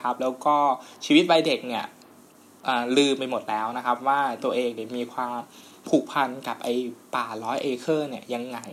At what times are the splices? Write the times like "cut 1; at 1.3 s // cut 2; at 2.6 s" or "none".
none

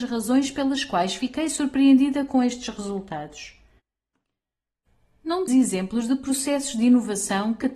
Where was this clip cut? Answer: cut 1; at 5.5 s

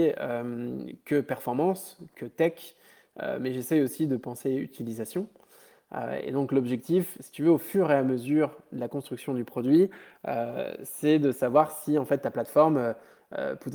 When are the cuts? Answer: none

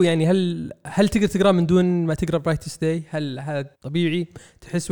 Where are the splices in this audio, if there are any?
cut 1; at 3.7 s

